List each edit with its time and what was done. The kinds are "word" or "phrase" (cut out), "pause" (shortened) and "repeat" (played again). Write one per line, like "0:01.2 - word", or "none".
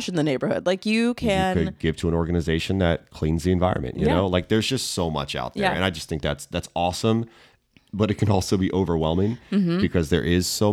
none